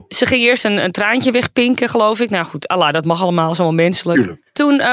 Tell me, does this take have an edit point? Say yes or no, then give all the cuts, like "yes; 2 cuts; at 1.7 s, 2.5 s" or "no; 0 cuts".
no; 0 cuts